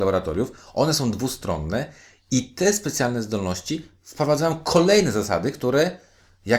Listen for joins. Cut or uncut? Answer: uncut